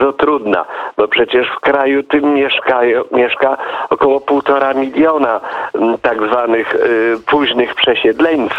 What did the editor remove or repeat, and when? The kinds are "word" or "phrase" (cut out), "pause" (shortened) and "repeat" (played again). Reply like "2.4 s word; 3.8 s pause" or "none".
none